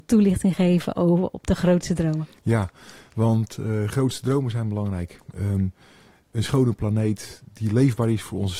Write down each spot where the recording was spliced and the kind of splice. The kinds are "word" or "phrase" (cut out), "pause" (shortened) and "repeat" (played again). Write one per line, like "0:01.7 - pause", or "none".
none